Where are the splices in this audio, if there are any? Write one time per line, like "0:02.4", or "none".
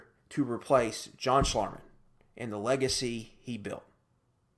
none